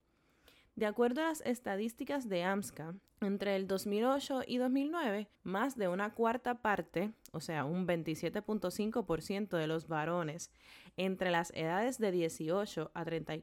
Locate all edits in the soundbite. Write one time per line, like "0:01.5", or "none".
0:03.1
0:05.3